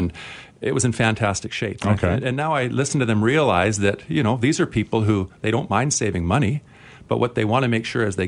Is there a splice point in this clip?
no; 0 cuts

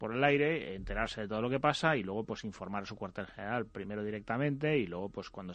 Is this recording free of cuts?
yes; 0 cuts

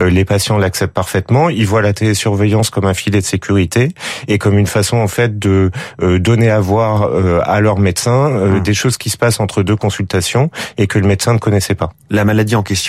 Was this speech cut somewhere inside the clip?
no; 0 cuts

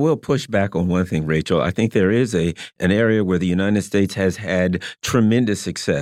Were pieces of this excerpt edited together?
no; 0 cuts

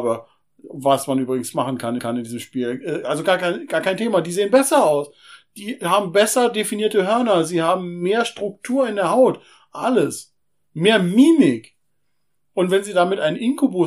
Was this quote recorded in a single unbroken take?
no; 1 cut; at 2.0 s

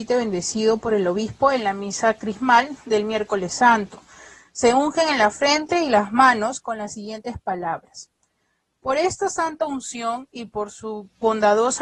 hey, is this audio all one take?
yes; 0 cuts

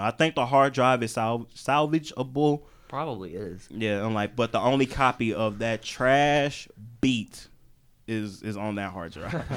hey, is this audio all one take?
yes; 0 cuts

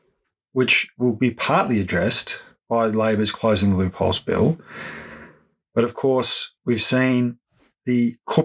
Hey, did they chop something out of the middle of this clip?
yes; 1 cut; at 6.6 s

